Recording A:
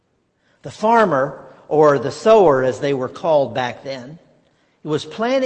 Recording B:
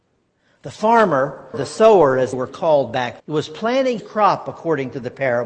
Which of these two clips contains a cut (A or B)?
B